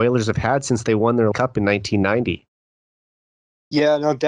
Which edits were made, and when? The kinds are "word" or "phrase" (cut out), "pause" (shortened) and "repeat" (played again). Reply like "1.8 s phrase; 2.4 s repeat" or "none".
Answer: 1.3 s phrase